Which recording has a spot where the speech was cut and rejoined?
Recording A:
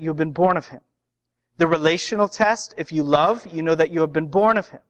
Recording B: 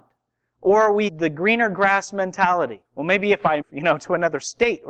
B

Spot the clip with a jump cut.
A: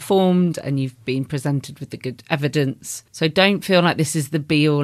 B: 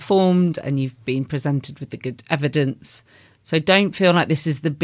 A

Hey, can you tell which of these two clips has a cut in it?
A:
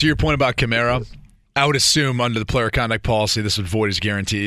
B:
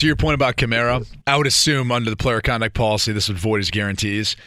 B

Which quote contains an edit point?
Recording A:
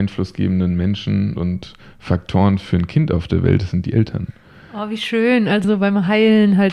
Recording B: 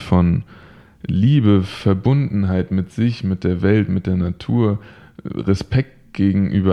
A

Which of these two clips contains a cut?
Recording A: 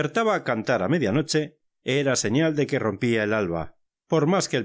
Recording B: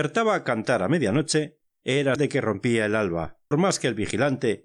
B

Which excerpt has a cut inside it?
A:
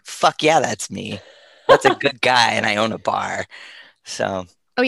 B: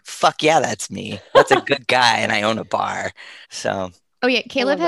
B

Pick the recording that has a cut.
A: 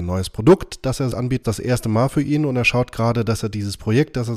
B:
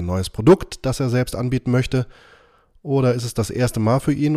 A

